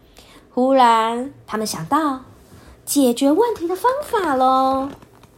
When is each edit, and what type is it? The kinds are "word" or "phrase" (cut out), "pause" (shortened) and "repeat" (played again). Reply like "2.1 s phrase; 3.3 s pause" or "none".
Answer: 1.4 s pause